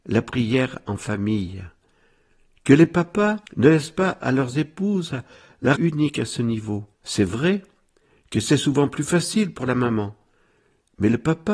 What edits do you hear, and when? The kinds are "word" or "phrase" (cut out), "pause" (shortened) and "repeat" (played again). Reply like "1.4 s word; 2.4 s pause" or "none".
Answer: 3.5 s pause; 5.8 s word; 6.9 s pause